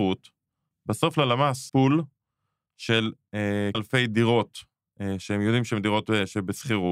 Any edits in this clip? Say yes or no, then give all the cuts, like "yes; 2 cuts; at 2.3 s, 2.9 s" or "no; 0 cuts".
yes; 2 cuts; at 1.7 s, 3.7 s